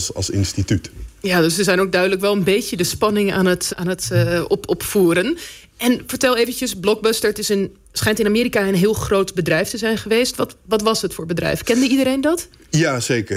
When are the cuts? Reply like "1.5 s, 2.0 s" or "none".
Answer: 3.7 s